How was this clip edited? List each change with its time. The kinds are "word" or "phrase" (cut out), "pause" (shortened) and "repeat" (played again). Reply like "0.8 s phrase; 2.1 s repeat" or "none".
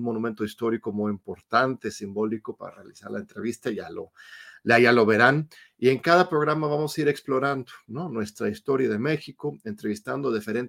none